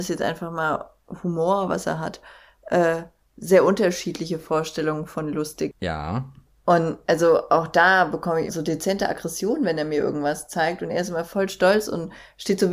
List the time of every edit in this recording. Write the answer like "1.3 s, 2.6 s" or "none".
6.4 s, 8.5 s